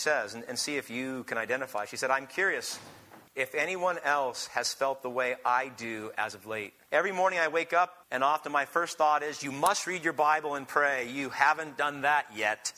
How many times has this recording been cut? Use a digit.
3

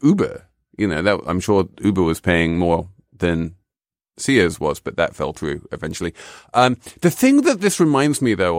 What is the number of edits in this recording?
0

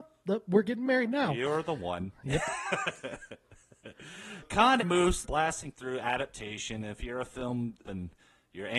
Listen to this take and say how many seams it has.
4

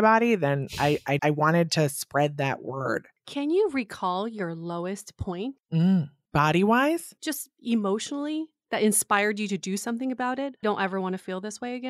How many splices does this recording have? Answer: 3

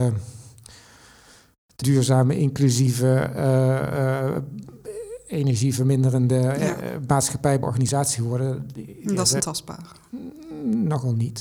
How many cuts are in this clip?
3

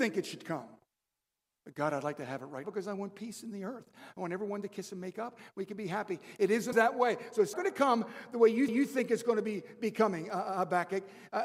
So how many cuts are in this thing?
4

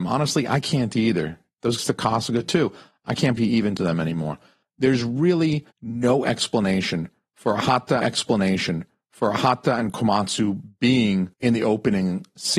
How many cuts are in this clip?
7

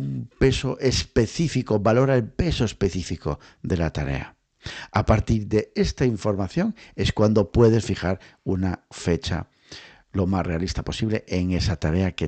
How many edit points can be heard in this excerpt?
0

